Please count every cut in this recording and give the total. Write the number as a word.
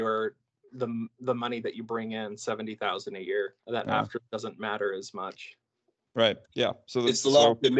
three